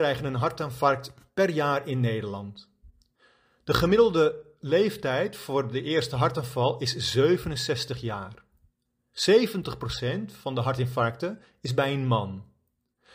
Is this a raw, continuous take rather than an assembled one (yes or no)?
yes